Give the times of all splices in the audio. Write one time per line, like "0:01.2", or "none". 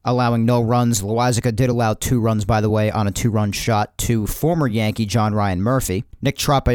none